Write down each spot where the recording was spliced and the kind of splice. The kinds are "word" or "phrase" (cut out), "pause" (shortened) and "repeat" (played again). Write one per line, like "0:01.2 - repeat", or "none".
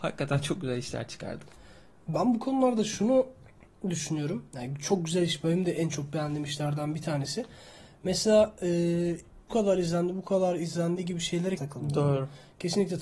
0:09.5 - word
0:11.6 - word

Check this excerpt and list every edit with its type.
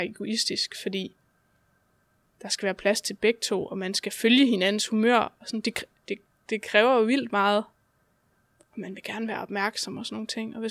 none

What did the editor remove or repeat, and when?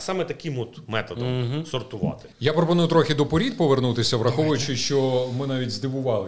0:02.3 - pause

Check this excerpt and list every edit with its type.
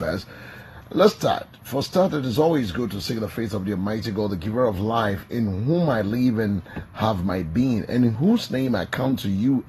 none

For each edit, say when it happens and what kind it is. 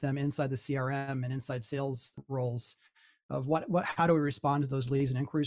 none

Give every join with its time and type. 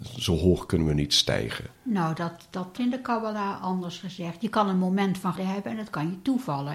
0:01.8 - pause
0:02.8 - word
0:05.4 - word

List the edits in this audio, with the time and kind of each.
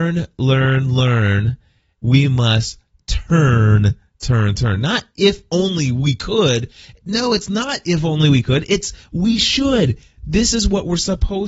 none

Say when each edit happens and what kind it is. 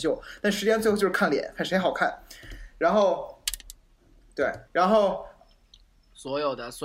0:04.7 - pause

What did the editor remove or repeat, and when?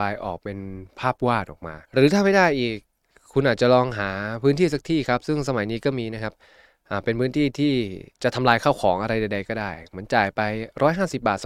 0:01.8 - pause
0:08.1 - pause

